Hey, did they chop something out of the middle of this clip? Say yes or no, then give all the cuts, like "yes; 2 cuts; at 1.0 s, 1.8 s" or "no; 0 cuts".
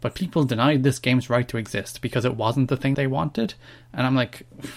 yes; 1 cut; at 2.9 s